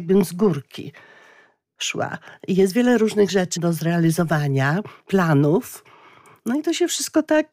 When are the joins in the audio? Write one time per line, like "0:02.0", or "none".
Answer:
0:03.6
0:05.0